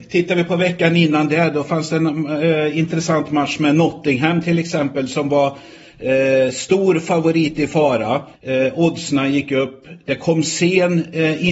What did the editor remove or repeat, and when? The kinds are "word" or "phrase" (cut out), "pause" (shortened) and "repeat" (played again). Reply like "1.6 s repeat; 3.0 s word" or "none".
8.3 s pause

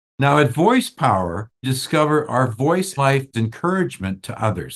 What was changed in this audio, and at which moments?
1.6 s word; 3.0 s word; 3.3 s word

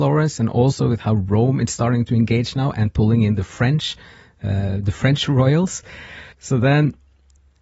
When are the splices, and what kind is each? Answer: 6.3 s pause

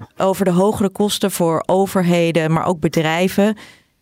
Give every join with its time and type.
none

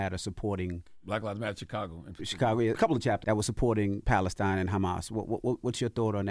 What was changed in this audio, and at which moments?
2.7 s word; 3.2 s word

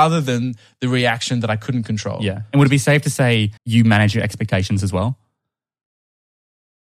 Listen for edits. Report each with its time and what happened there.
3.6 s pause

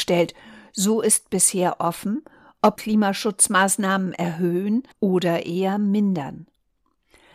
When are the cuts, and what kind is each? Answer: 2.8 s phrase; 4.9 s pause

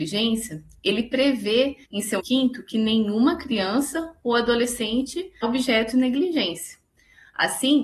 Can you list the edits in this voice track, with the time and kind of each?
1.8 s pause; 2.2 s word; 5.4 s word; 5.9 s phrase

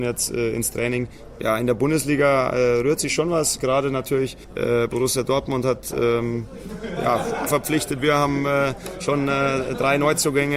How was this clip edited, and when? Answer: 4.4 s pause; 7.5 s phrase

